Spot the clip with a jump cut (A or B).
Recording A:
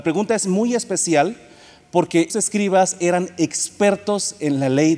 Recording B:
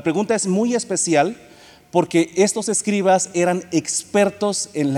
A